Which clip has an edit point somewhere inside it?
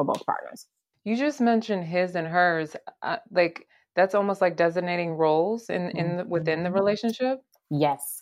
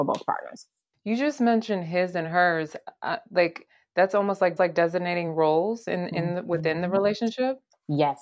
second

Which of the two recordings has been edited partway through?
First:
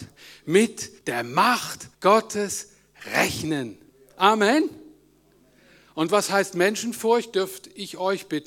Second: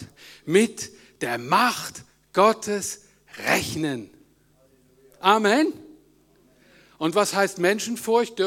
first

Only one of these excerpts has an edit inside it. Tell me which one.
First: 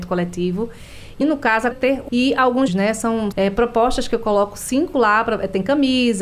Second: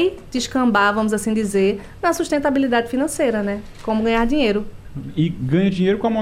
first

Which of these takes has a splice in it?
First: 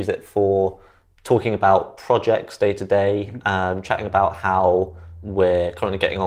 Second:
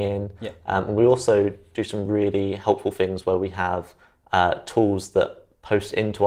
first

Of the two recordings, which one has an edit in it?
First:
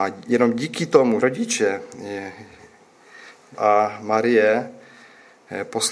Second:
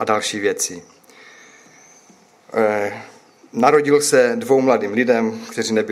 first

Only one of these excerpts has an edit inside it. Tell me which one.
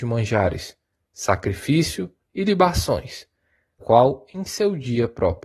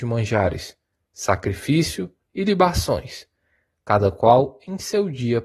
first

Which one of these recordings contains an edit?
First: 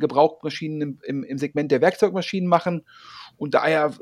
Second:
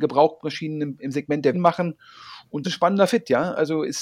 second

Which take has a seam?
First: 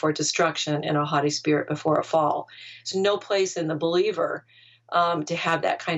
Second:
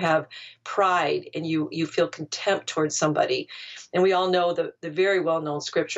first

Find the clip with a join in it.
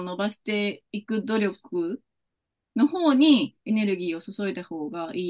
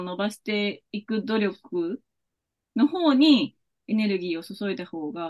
first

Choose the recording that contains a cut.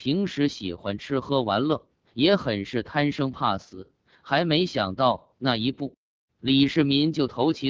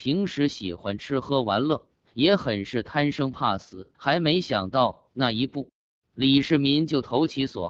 second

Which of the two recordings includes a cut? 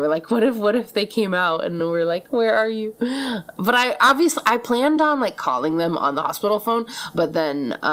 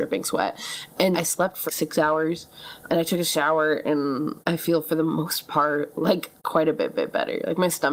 second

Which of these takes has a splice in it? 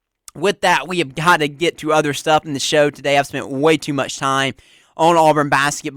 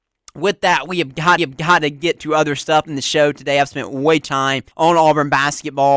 second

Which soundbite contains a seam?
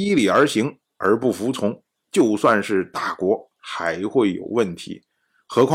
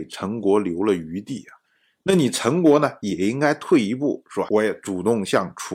second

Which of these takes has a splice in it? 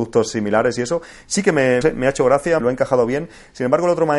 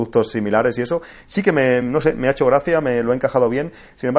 first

